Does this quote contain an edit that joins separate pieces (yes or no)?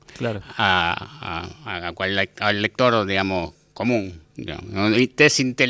no